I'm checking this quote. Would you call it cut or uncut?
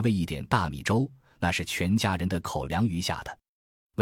uncut